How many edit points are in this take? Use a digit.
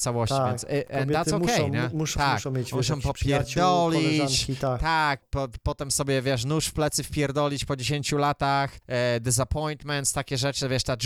3